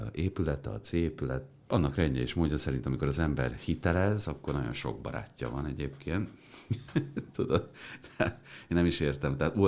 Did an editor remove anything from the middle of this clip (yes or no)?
no